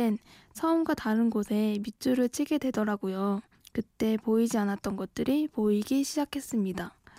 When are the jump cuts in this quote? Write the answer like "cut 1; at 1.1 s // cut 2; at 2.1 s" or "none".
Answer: cut 1; at 3.5 s